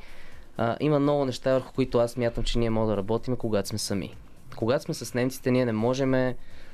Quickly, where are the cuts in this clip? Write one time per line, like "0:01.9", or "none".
none